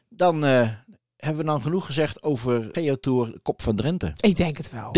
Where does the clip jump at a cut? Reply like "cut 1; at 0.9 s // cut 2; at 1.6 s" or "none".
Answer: cut 1; at 2.7 s

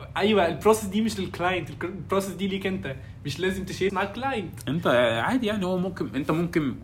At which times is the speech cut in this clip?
cut 1; at 3.9 s

